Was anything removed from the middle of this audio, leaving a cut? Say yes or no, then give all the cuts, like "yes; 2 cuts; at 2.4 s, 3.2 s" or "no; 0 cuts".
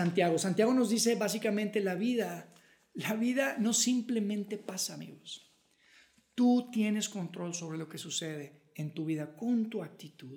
no; 0 cuts